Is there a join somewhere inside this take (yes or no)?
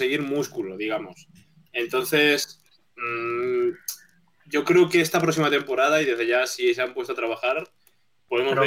no